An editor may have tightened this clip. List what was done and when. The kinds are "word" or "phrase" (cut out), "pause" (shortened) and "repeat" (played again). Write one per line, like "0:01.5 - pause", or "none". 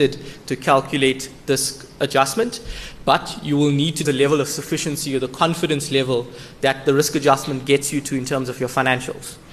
0:04.0 - word